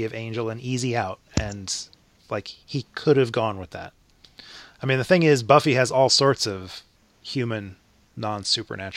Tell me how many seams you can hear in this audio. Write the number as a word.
two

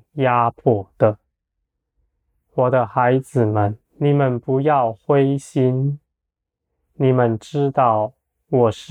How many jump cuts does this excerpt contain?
one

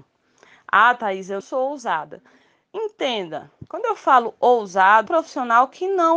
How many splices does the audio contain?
three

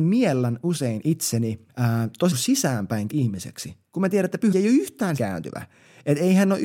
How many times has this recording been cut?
six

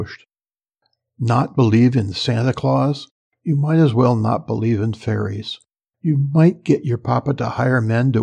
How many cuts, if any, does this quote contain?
zero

